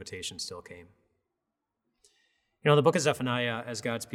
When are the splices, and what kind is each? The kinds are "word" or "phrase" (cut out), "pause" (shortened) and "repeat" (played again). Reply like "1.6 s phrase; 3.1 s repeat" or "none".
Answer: none